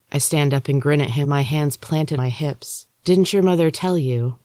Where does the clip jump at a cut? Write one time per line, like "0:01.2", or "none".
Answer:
0:01.2
0:02.2
0:02.9